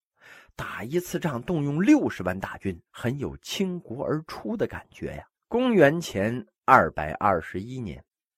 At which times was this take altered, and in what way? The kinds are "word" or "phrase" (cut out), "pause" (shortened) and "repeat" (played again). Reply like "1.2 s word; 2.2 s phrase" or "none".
2.9 s word; 5.3 s pause